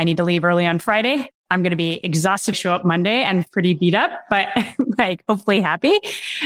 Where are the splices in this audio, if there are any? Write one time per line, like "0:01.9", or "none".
0:02.5
0:03.5